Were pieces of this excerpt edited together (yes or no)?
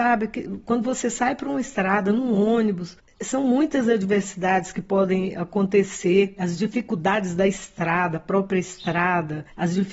no